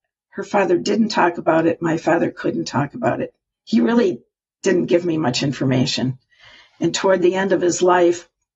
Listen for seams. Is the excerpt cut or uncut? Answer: uncut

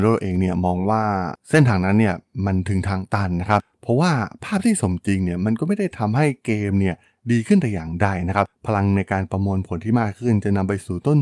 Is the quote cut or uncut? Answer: uncut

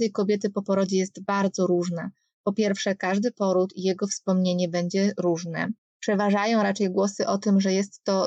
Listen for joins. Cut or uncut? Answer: uncut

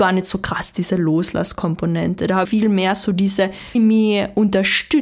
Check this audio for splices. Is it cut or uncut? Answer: cut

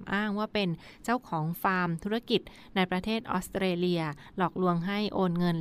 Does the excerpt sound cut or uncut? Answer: uncut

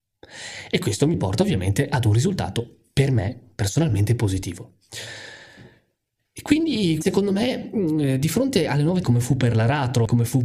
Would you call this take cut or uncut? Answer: cut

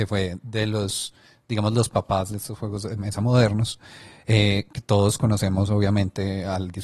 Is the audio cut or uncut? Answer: uncut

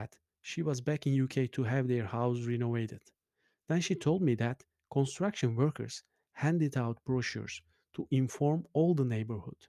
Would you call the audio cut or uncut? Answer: uncut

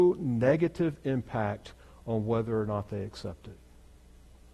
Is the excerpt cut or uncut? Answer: uncut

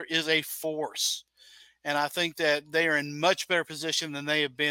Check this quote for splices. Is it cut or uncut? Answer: uncut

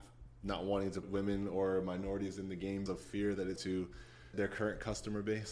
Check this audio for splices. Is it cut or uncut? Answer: cut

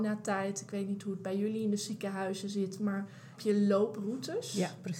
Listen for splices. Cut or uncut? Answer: cut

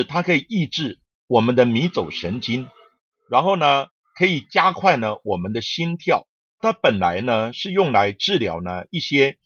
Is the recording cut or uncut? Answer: uncut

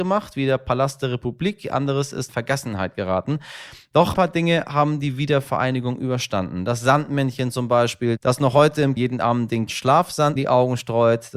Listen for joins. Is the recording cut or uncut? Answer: cut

